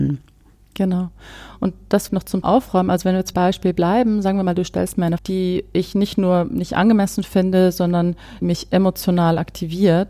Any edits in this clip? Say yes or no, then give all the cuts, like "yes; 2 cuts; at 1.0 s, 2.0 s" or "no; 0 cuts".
yes; 5 cuts; at 2.1 s, 2.4 s, 3.3 s, 5.2 s, 8.4 s